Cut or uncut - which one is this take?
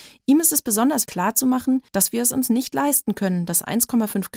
cut